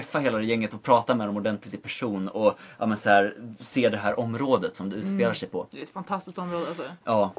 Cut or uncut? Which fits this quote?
uncut